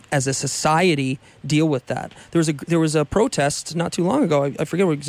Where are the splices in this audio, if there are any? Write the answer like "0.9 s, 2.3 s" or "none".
none